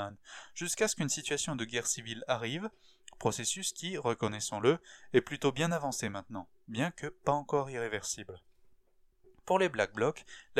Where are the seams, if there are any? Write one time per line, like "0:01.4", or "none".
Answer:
none

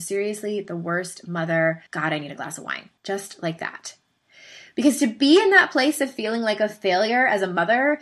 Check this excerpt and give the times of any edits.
0:01.9
0:03.0

